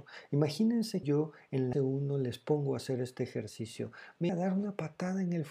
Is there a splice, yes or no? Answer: yes